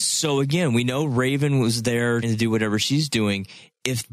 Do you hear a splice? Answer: yes; 1 cut; at 2.2 s

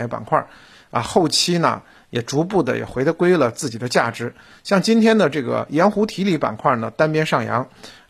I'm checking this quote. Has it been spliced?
no; 0 cuts

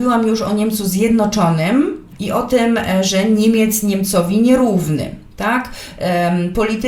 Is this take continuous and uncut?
yes; 0 cuts

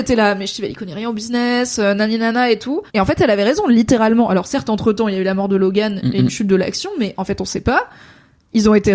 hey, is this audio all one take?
no; 1 cut; at 2.9 s

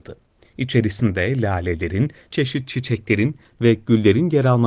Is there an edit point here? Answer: yes; 1 cut; at 2.3 s

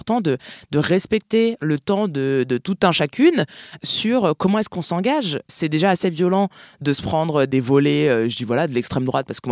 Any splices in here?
no; 0 cuts

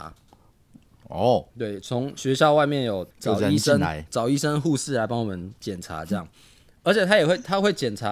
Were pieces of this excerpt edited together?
yes; 3 cuts; at 1.5 s, 3.1 s, 5.6 s

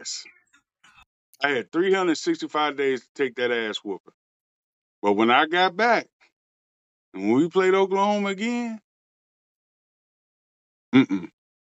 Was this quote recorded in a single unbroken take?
yes; 0 cuts

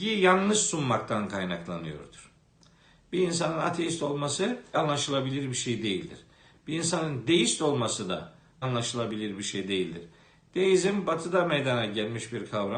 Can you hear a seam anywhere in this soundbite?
yes; 2 cuts; at 4.7 s, 8.6 s

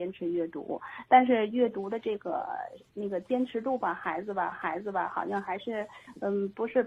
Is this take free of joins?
no; 1 cut; at 4.5 s

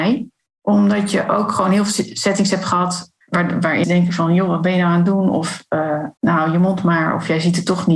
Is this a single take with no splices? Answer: no; 3 cuts; at 3.2 s, 3.8 s, 6.2 s

